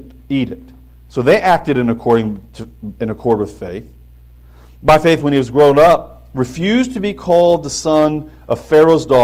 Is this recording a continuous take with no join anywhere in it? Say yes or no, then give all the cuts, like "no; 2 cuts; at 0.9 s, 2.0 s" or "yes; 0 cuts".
no; 2 cuts; at 3.0 s, 5.2 s